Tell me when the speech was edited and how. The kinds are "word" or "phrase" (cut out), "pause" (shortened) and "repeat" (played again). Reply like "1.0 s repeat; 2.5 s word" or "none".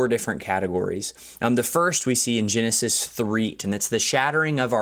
3.6 s word

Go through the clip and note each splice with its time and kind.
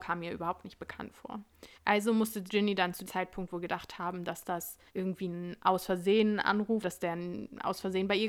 1.7 s pause; 2.5 s word; 3.1 s word; 4.9 s pause; 6.8 s word

